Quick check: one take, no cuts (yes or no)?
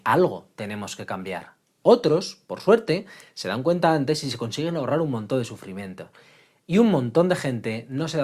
yes